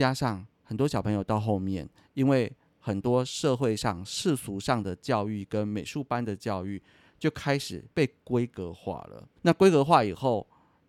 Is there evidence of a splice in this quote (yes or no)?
yes